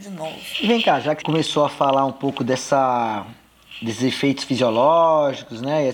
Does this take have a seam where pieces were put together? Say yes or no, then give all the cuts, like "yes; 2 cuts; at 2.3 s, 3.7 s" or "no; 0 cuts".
yes; 1 cut; at 1.2 s